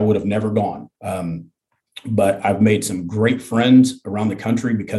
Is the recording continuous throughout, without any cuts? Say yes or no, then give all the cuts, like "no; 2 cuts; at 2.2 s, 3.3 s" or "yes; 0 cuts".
no; 1 cut; at 0.9 s